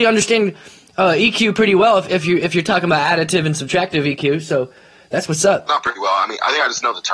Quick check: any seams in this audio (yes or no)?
no